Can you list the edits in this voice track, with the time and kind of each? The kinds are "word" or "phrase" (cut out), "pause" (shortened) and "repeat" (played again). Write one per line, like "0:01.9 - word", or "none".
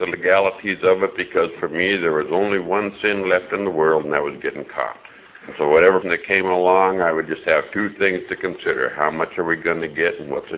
0:05.1 - pause
0:06.0 - word